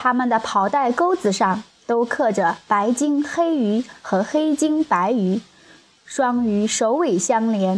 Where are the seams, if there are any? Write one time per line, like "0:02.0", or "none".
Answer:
none